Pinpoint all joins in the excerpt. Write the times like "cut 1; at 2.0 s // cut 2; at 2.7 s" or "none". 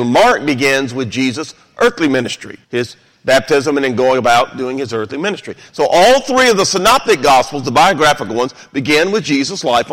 cut 1; at 2.6 s